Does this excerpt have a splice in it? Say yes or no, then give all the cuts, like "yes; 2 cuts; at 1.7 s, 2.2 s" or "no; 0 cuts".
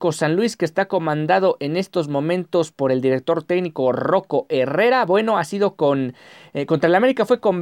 no; 0 cuts